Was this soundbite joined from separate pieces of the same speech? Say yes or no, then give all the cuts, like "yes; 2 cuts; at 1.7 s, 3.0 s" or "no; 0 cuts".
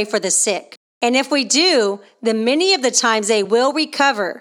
no; 0 cuts